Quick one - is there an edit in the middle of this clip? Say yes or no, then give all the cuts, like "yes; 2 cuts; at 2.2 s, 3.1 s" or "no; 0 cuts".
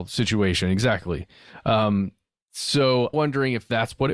yes; 1 cut; at 3.1 s